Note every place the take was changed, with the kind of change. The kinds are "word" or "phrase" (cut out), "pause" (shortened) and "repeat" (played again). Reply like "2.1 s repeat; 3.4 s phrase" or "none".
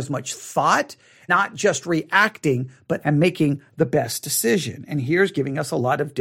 1.3 s word; 3.0 s word